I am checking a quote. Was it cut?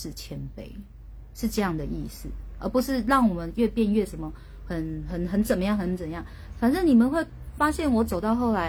no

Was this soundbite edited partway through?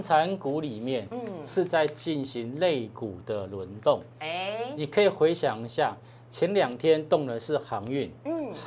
no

